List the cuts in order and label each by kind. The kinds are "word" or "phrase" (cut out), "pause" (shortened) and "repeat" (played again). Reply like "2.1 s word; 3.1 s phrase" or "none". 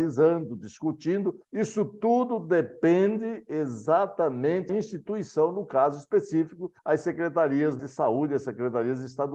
1.4 s pause; 4.7 s word; 6.8 s pause; 7.8 s word